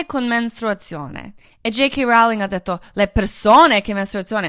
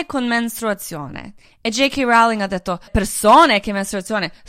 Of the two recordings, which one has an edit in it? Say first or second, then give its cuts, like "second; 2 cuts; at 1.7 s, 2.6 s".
second; 1 cut; at 2.9 s